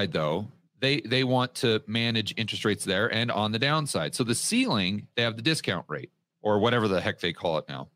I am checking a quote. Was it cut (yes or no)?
no